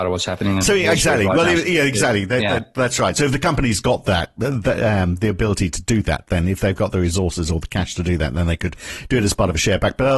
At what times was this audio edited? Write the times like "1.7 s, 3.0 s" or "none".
none